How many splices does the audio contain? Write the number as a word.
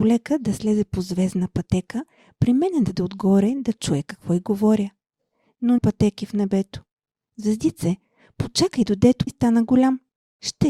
three